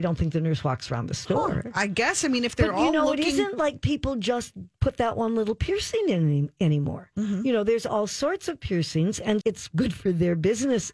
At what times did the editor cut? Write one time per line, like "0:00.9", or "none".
0:09.4